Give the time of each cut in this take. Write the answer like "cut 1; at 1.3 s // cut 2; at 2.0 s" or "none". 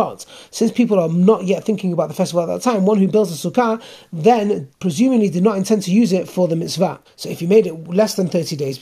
cut 1; at 7.0 s

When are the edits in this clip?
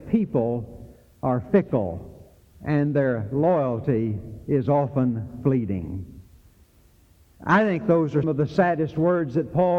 cut 1; at 8.2 s

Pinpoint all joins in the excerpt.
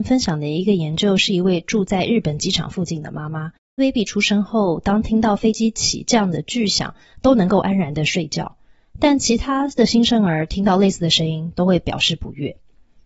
cut 1; at 3.8 s

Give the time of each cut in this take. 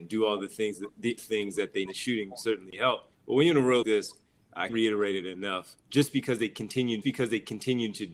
cut 1; at 1.2 s // cut 2; at 1.9 s // cut 3; at 3.1 s // cut 4; at 3.8 s // cut 5; at 4.7 s // cut 6; at 5.8 s // cut 7; at 7.0 s

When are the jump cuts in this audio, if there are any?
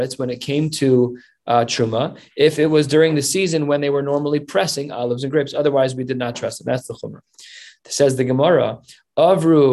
none

